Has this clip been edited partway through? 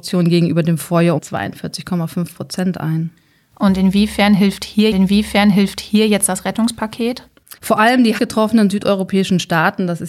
yes; 4 cuts; at 1.2 s, 4.9 s, 7.6 s, 8.2 s

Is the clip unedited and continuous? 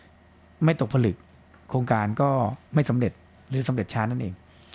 yes; 0 cuts

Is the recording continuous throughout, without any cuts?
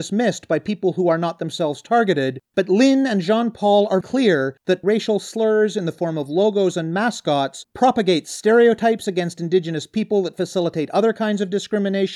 no; 2 cuts; at 4.0 s, 4.8 s

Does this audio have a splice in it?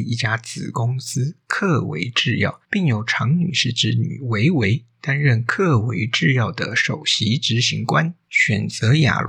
yes; 2 cuts; at 2.6 s, 8.2 s

